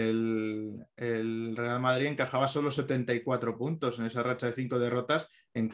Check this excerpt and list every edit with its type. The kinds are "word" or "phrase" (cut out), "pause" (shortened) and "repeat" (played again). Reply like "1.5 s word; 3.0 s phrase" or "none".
none